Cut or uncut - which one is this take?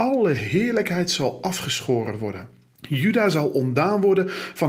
cut